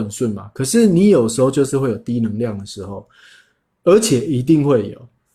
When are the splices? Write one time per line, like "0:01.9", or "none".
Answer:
none